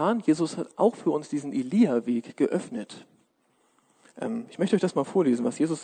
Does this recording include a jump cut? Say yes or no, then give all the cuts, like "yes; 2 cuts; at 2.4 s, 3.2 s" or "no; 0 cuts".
no; 0 cuts